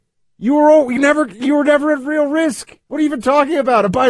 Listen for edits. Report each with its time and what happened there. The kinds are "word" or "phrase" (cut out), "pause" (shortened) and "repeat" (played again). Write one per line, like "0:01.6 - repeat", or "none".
0:01.0 - word
0:02.8 - pause